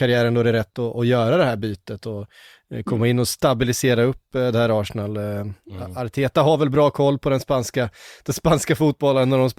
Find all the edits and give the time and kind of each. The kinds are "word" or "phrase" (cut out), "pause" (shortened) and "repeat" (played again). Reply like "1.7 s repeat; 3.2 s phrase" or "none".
none